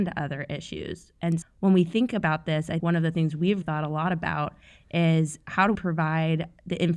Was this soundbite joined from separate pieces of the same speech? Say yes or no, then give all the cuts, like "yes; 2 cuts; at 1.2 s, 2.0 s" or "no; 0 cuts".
yes; 4 cuts; at 1.4 s, 2.8 s, 3.6 s, 5.7 s